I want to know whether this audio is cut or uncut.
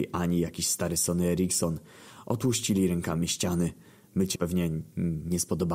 cut